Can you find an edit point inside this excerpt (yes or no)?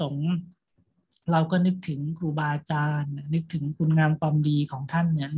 yes